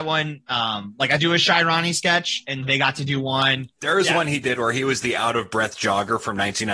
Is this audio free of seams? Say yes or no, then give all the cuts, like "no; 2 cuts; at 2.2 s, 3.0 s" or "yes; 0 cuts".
no; 2 cuts; at 1.2 s, 2.6 s